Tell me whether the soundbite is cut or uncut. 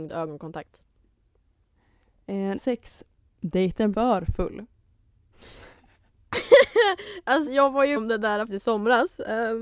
cut